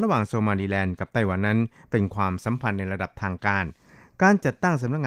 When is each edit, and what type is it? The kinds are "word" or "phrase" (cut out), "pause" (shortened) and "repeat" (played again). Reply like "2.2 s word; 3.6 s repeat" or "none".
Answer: none